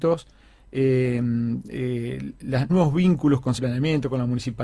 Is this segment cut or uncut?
cut